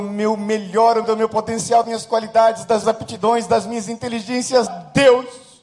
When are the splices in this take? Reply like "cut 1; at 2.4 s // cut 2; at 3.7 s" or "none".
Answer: cut 1; at 1.0 s // cut 2; at 1.8 s // cut 3; at 2.8 s // cut 4; at 4.7 s